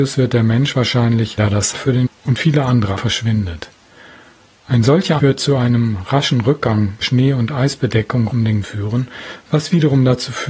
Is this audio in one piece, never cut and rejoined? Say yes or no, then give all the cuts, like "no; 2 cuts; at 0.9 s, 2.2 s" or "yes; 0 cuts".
no; 8 cuts; at 1.4 s, 1.7 s, 2.1 s, 3.0 s, 5.2 s, 7.0 s, 8.3 s, 8.6 s